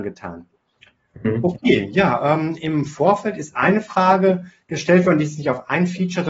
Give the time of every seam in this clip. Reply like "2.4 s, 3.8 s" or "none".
none